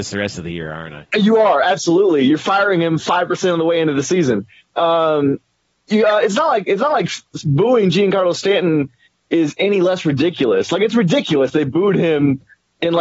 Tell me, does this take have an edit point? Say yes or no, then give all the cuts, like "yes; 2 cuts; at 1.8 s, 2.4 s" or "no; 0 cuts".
no; 0 cuts